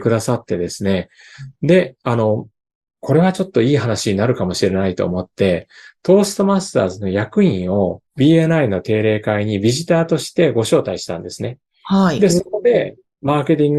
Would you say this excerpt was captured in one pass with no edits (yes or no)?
no